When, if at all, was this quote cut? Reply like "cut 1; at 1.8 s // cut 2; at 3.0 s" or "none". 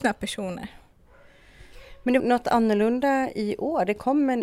cut 1; at 2.2 s